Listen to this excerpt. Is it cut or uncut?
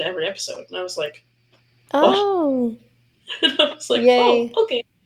uncut